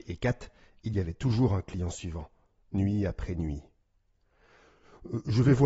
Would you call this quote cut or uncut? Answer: uncut